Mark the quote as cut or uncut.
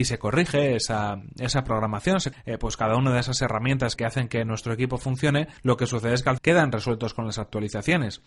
cut